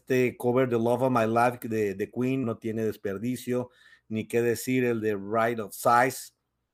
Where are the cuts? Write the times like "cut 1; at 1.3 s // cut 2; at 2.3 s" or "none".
cut 1; at 2.4 s